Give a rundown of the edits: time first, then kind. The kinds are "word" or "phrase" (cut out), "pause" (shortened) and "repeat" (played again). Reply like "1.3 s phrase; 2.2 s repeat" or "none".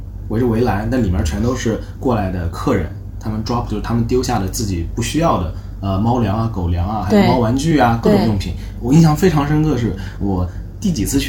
3.7 s word